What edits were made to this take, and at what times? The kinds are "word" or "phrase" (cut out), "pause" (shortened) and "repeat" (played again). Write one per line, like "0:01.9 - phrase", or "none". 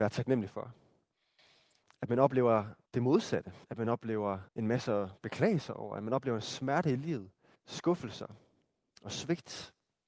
0:02.9 - pause
0:03.6 - pause
0:04.5 - pause
0:07.5 - pause